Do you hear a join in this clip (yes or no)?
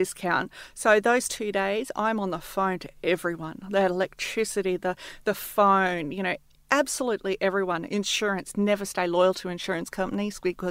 no